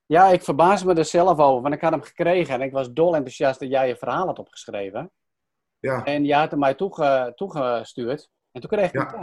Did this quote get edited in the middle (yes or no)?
no